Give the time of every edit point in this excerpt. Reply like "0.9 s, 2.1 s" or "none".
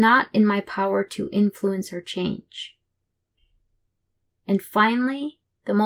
none

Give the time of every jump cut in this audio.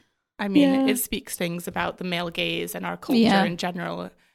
1.4 s

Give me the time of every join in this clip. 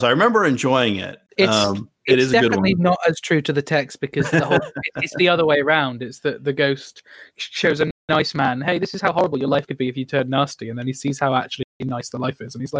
1.3 s, 8.0 s, 11.7 s

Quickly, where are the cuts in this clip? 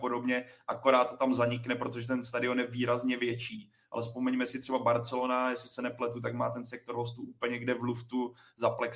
none

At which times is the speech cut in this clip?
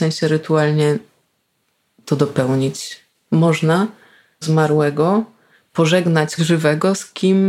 4.4 s, 6.4 s

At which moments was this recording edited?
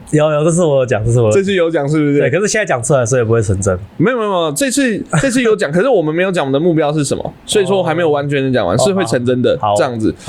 7.4 s

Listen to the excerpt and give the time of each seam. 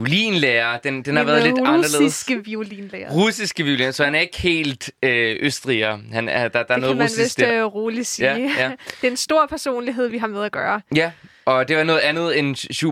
none

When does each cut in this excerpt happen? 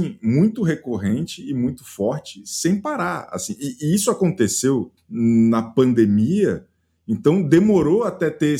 5.0 s

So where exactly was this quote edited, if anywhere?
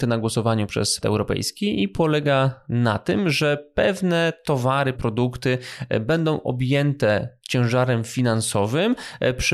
1.0 s, 4.9 s

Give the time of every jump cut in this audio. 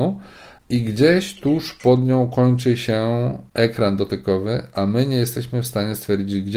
none

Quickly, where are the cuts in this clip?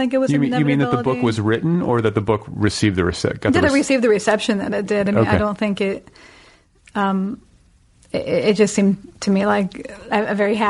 none

